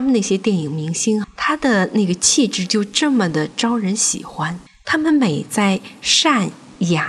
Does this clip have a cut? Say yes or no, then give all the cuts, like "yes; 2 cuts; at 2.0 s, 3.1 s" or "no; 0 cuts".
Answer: yes; 2 cuts; at 1.2 s, 4.7 s